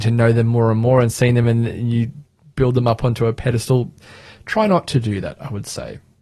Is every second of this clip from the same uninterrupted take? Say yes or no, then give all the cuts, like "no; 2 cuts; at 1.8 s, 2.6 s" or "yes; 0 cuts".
yes; 0 cuts